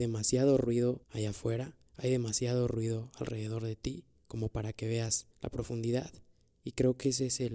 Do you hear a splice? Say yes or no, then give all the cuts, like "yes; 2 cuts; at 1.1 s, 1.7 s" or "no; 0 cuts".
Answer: yes; 4 cuts; at 1.0 s, 1.9 s, 4.2 s, 5.3 s